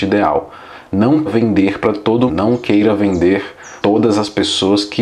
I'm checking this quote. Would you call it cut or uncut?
cut